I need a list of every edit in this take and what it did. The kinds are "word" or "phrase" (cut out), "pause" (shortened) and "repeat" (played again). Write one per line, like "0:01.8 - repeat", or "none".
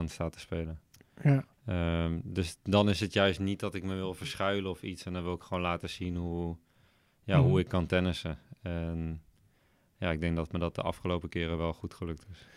none